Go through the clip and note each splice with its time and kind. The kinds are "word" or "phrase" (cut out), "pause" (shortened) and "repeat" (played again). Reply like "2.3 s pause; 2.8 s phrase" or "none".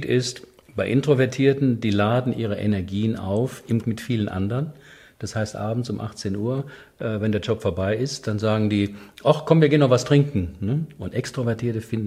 3.8 s word